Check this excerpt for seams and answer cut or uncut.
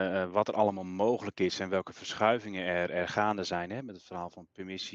uncut